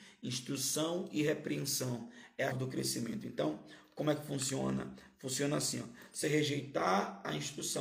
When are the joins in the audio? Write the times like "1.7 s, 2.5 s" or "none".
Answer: 2.5 s, 6.2 s